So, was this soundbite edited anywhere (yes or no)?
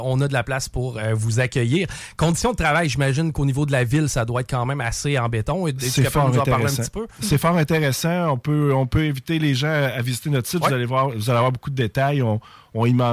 no